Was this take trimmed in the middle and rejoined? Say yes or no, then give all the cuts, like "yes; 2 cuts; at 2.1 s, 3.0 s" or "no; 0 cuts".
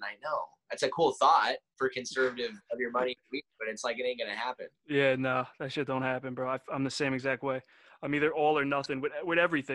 no; 0 cuts